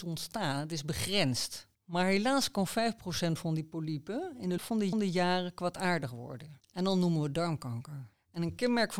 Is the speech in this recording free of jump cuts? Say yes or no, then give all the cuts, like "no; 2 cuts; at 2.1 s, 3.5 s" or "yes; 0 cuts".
no; 3 cuts; at 1.7 s, 4.6 s, 4.9 s